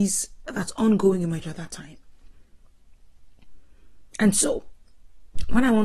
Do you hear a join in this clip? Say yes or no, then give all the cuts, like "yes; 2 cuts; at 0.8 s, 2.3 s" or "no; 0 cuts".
yes; 1 cut; at 1.4 s